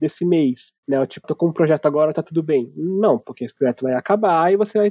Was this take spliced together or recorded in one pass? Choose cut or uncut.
cut